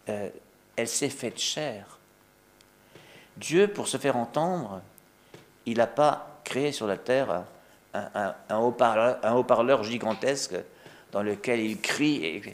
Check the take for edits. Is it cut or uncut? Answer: uncut